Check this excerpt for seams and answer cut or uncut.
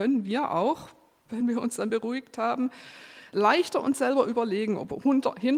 uncut